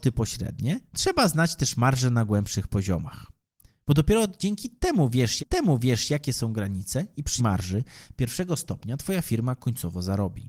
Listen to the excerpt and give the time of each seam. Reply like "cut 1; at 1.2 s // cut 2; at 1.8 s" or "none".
cut 1; at 5.4 s // cut 2; at 7.4 s